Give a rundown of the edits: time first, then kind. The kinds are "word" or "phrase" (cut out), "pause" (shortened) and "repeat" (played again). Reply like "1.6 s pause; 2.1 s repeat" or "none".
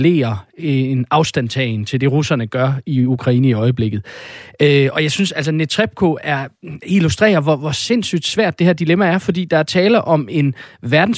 none